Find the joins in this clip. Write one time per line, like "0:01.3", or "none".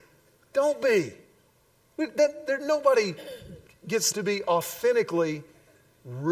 0:01.5
0:04.1